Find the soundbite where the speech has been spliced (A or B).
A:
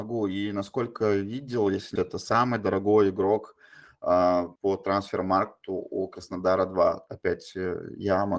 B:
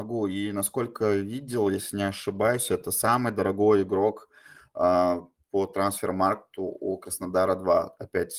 A